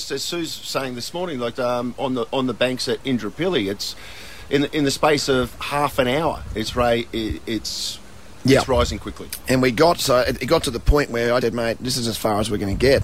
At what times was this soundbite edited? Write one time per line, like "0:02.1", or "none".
0:01.6
0:09.0
0:11.4
0:11.8